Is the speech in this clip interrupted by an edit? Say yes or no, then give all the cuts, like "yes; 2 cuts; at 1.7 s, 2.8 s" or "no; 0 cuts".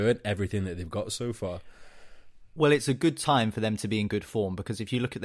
no; 0 cuts